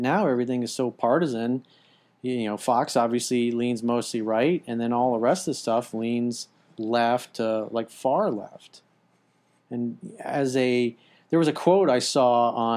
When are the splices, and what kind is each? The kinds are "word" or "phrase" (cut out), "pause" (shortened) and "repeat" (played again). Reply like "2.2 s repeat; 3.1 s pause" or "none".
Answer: none